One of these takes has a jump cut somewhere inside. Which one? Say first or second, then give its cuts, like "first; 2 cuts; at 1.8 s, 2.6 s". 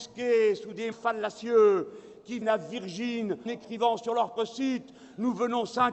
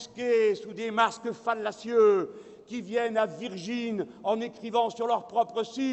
first; 4 cuts; at 0.9 s, 2.4 s, 3.5 s, 4.4 s